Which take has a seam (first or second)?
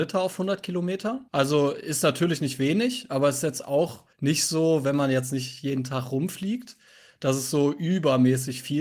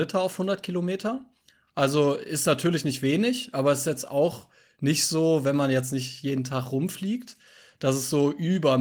first